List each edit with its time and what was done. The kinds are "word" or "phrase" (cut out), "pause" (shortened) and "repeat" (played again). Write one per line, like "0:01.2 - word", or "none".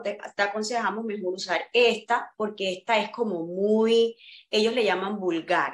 none